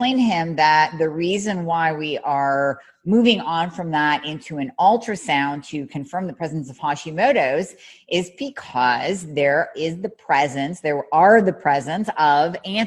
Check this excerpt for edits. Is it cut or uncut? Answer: uncut